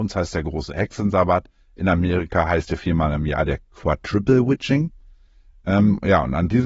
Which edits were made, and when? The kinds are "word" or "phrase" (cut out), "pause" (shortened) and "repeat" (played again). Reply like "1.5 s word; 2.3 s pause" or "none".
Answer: none